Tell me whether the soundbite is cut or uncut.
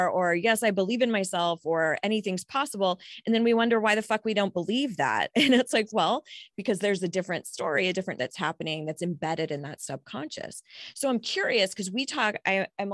cut